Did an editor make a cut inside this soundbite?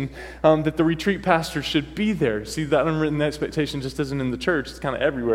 no; 0 cuts

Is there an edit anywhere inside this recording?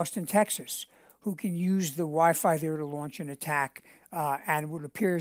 no; 0 cuts

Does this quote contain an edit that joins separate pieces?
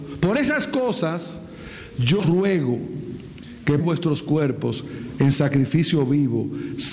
yes; 2 cuts; at 2.2 s, 3.8 s

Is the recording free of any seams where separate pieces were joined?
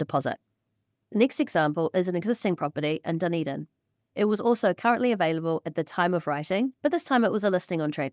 yes; 0 cuts

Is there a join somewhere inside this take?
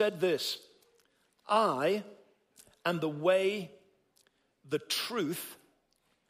no; 0 cuts

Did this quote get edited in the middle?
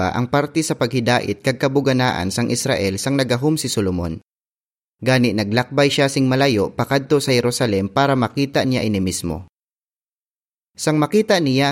no; 0 cuts

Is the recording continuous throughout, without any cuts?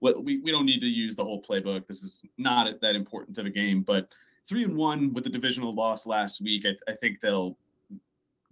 yes; 0 cuts

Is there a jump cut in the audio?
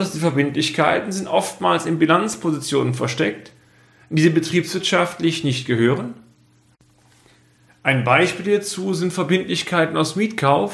no; 0 cuts

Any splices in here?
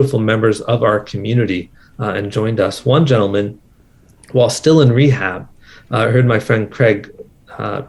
no; 0 cuts

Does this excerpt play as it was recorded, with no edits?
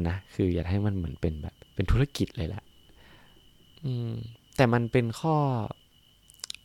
no; 1 cut; at 1.6 s

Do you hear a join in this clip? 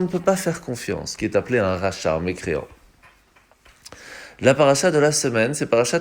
no; 0 cuts

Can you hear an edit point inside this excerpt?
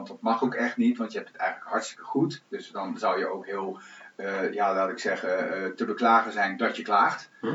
no; 0 cuts

